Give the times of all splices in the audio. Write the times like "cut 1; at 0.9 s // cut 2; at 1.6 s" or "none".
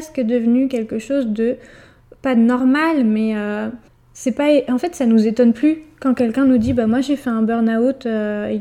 cut 1; at 3.9 s